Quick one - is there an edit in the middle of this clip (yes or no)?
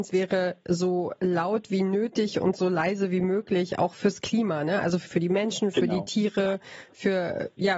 yes